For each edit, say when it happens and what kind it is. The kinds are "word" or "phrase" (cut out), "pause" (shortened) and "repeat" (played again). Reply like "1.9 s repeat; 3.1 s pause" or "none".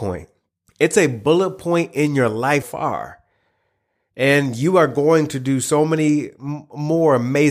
2.6 s word